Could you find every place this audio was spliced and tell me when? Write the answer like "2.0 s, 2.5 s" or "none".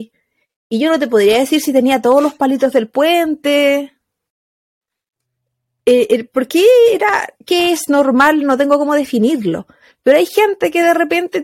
7.4 s